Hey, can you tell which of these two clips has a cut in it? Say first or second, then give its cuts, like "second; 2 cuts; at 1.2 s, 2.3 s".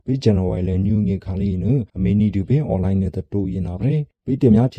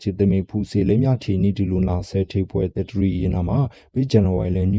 first; 1 cut; at 1.9 s